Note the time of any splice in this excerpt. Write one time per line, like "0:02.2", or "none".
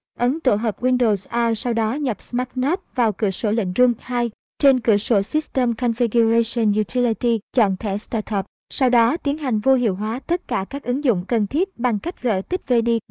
0:07.4
0:11.3